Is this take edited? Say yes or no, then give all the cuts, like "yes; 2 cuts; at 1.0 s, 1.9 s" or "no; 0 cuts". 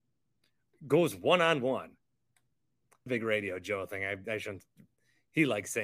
yes; 1 cut; at 3.1 s